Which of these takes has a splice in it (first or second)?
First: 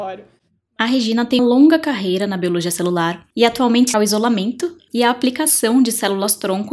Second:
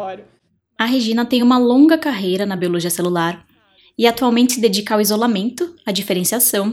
first